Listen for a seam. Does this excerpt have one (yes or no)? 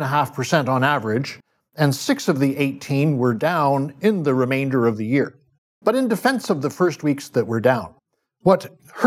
no